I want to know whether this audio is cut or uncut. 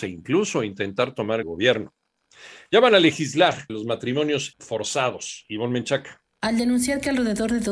cut